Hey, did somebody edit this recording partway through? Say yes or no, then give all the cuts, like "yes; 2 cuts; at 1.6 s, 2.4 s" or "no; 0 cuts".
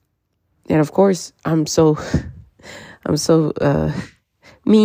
yes; 1 cut; at 1.4 s